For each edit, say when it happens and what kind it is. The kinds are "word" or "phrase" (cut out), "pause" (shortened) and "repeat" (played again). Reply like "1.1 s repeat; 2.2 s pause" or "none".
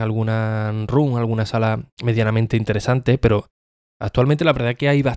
none